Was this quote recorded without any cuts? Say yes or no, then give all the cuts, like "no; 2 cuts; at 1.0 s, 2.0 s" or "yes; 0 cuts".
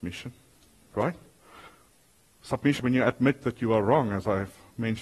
no; 1 cut; at 2.8 s